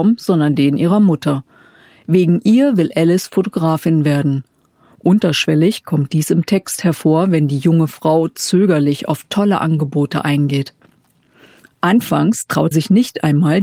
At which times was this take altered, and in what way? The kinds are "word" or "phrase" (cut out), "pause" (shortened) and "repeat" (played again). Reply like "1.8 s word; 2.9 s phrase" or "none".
12.7 s word